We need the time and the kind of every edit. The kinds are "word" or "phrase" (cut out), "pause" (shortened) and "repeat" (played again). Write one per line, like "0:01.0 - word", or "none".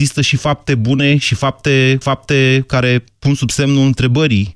0:02.0 - repeat